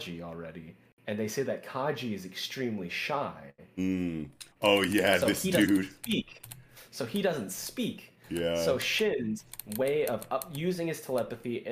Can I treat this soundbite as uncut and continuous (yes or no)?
no